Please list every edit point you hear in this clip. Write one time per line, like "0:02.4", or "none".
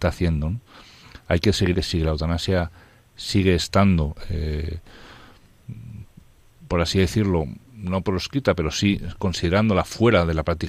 0:01.7